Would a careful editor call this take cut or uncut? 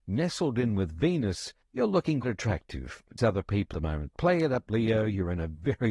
cut